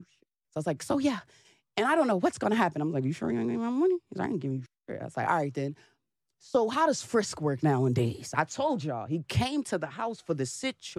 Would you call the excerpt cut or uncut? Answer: uncut